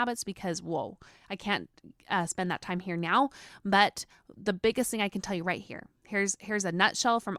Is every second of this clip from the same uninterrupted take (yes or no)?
yes